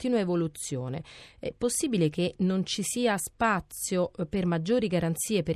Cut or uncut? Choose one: uncut